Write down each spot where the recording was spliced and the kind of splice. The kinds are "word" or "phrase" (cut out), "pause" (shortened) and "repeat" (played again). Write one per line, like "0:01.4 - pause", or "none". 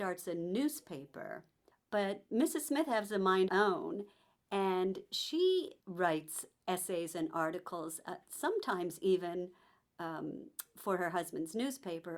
0:03.5 - phrase
0:05.8 - pause